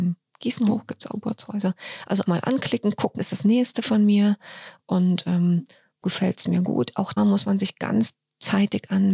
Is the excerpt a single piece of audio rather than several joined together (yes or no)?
no